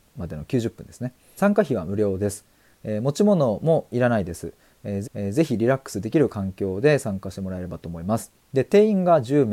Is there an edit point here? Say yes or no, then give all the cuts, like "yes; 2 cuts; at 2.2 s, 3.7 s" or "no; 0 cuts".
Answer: yes; 3 cuts; at 1.4 s, 5.0 s, 8.3 s